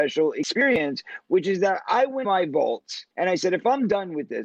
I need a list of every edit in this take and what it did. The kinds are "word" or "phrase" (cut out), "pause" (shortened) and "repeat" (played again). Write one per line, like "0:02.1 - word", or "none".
0:02.2 - word
0:03.1 - pause